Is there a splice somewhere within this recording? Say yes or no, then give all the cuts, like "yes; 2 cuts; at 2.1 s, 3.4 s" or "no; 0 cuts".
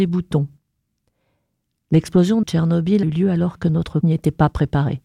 yes; 3 cuts; at 2.4 s, 3.0 s, 4.0 s